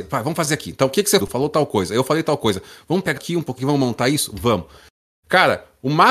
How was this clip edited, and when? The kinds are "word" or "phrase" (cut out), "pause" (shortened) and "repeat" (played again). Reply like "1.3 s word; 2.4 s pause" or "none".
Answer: 1.2 s word; 3.2 s phrase; 3.6 s word